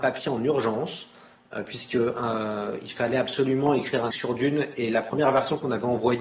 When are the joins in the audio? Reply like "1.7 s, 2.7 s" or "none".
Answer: 4.1 s